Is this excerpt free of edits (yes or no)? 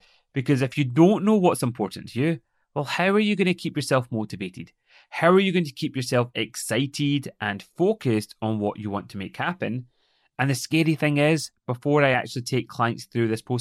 yes